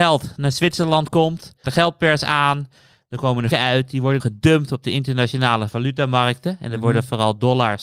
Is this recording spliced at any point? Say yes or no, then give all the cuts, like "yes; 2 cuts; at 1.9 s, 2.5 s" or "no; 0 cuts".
yes; 3 cuts; at 1.6 s, 3.5 s, 4.2 s